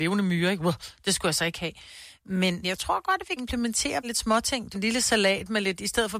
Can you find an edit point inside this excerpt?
yes; 4 cuts; at 2.6 s, 3.4 s, 4.0 s, 4.7 s

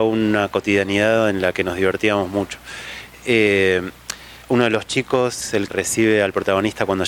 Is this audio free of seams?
no; 2 cuts; at 4.4 s, 5.7 s

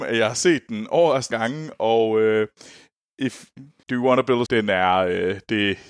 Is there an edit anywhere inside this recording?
yes; 3 cuts; at 1.3 s, 3.8 s, 4.5 s

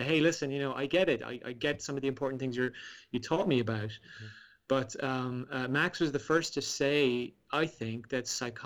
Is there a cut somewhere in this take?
no; 0 cuts

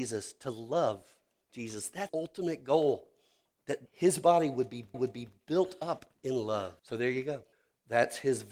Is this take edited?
yes; 7 cuts; at 1.5 s, 2.1 s, 3.9 s, 4.9 s, 6.1 s, 6.8 s, 7.5 s

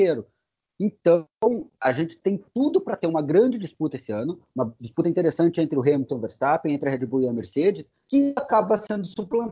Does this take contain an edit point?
yes; 1 cut; at 1.7 s

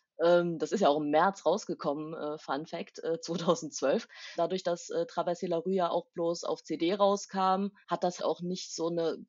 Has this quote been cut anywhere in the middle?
yes; 2 cuts; at 7.8 s, 8.2 s

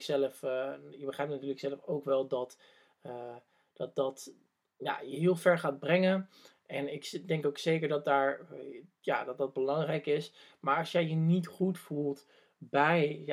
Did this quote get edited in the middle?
no; 0 cuts

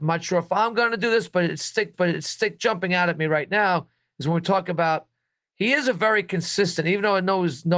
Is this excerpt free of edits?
no; 1 cut; at 1.9 s

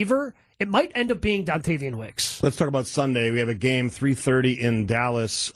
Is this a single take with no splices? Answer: yes; 0 cuts

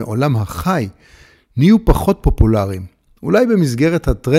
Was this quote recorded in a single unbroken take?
yes; 0 cuts

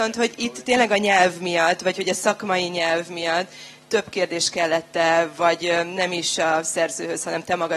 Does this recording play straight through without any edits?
yes; 0 cuts

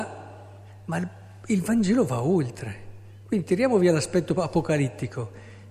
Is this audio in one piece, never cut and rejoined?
yes; 0 cuts

